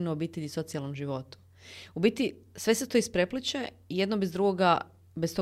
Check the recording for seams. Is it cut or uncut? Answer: uncut